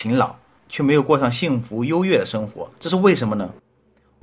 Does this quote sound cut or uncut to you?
cut